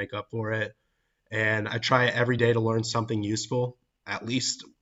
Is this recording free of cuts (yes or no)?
yes